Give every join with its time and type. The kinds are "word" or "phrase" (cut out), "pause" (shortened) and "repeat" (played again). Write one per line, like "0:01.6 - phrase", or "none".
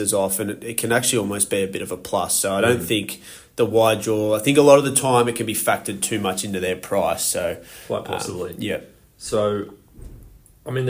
none